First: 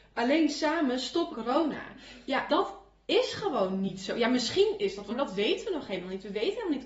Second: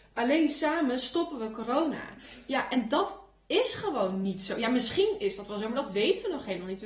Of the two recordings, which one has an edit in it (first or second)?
first